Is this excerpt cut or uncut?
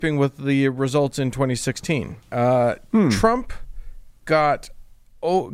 cut